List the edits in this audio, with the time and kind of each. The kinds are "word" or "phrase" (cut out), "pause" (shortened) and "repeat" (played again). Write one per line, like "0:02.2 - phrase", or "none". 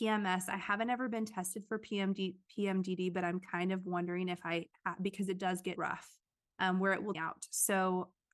0:05.8 - word
0:07.1 - phrase